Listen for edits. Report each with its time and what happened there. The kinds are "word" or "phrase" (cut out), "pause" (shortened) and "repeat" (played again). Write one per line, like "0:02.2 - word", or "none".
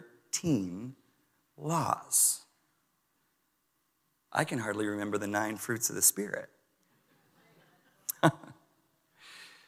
none